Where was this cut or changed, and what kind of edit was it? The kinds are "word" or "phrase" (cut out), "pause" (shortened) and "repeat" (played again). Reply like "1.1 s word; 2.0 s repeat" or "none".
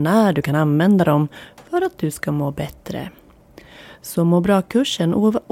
none